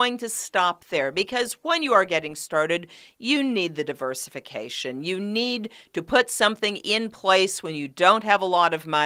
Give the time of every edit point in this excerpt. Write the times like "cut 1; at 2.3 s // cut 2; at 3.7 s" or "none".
none